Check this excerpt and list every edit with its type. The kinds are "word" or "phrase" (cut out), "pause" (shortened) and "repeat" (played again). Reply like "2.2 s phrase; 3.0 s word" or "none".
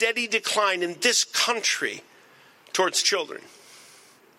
none